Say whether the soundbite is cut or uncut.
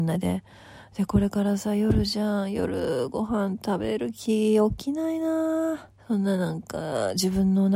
cut